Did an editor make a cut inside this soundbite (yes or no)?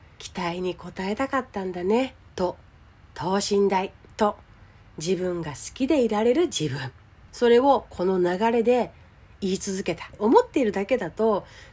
no